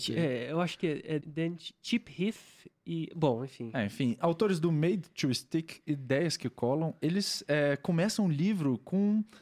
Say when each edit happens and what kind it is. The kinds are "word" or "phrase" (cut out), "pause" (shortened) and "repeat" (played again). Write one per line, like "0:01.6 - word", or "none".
0:01.2 - word